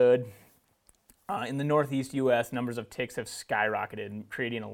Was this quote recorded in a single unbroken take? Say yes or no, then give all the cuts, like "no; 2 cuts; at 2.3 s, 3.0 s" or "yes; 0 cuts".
yes; 0 cuts